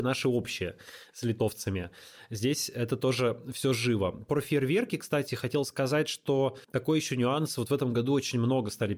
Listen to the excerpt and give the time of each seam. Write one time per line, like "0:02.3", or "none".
0:06.6